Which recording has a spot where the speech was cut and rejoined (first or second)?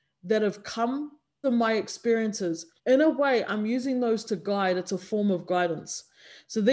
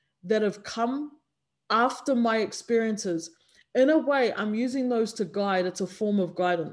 first